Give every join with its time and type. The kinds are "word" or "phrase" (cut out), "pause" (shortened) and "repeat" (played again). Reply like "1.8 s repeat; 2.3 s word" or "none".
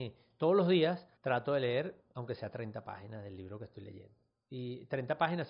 1.2 s pause